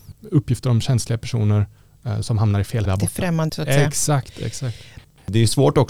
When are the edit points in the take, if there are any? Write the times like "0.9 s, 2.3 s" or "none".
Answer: 2.2 s, 2.8 s, 3.5 s